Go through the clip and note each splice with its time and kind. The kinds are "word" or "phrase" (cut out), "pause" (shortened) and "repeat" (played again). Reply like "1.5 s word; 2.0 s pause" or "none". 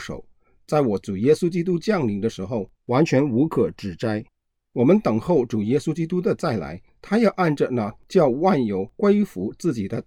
4.3 s pause

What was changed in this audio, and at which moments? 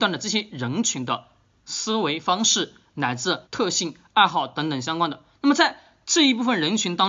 3.4 s pause

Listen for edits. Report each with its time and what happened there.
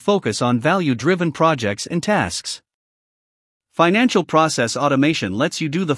none

